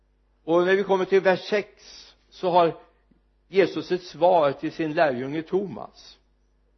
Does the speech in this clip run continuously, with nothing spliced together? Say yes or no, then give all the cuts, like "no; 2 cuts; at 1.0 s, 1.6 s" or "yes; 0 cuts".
yes; 0 cuts